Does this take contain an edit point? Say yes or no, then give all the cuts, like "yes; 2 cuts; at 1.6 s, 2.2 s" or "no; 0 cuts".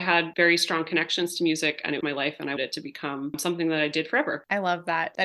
yes; 2 cuts; at 2.0 s, 2.6 s